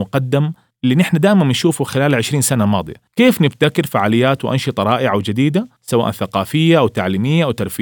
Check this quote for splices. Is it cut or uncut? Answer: uncut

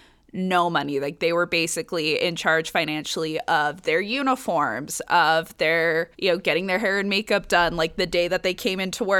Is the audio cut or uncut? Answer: cut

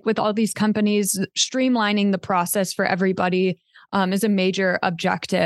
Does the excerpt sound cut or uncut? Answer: uncut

